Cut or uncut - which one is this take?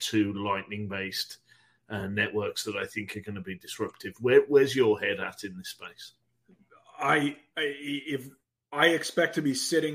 uncut